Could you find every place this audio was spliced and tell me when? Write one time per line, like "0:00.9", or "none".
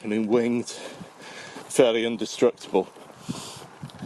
0:01.7